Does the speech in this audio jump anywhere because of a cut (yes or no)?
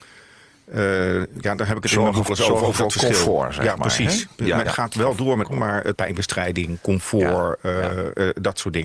yes